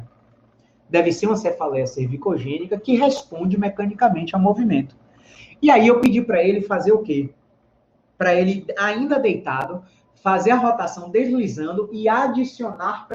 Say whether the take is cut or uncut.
uncut